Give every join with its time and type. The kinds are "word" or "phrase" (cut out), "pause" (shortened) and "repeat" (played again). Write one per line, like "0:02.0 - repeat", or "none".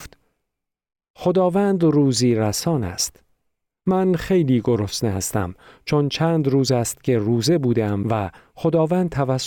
none